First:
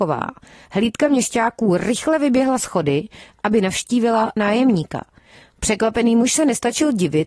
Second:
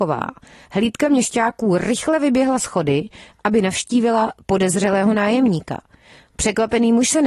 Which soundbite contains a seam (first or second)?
first